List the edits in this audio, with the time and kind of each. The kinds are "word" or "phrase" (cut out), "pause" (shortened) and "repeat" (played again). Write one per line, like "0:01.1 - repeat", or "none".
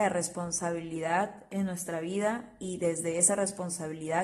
none